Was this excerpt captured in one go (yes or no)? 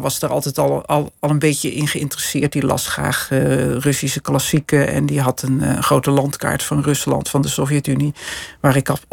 yes